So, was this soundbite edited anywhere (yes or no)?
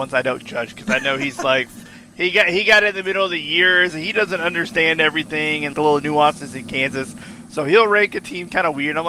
yes